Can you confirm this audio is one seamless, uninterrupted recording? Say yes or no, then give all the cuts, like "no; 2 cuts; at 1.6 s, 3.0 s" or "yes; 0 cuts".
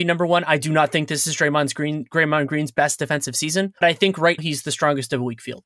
no; 2 cuts; at 3.8 s, 4.4 s